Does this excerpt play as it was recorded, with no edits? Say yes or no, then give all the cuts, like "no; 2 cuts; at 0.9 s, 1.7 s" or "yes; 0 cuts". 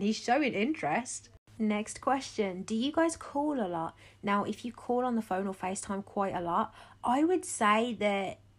yes; 0 cuts